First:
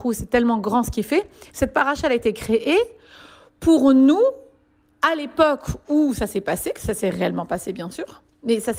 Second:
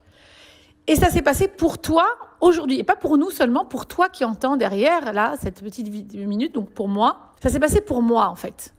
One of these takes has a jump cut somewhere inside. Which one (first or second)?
second